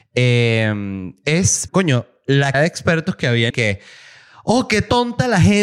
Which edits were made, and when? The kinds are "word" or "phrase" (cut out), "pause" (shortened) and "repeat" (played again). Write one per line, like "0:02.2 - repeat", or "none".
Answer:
0:01.7 - word
0:02.5 - word
0:03.5 - word